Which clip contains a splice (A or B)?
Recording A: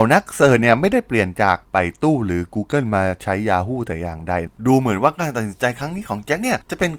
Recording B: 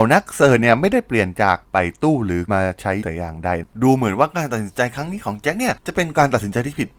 B